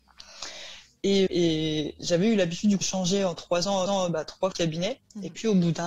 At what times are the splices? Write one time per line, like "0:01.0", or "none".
0:01.3
0:02.8
0:03.9
0:04.5